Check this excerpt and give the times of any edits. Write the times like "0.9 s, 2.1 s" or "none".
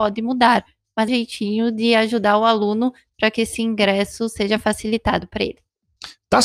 1.1 s